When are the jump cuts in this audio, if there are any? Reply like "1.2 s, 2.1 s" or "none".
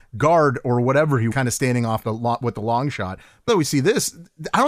1.3 s, 2.0 s, 3.5 s